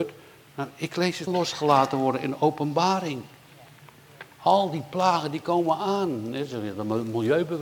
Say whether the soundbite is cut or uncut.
cut